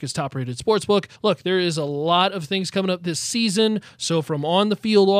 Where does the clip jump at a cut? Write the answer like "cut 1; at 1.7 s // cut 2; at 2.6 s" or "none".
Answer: cut 1; at 1.1 s